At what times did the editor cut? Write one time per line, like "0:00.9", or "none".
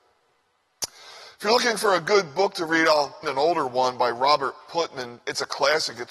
0:03.2